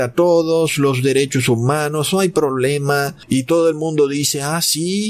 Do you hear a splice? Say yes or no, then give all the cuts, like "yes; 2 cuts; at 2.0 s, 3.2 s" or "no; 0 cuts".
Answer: no; 0 cuts